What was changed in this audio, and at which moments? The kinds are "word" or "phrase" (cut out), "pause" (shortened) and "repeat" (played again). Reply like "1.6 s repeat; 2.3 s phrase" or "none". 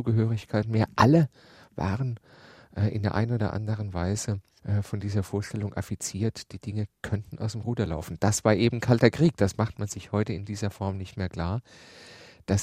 none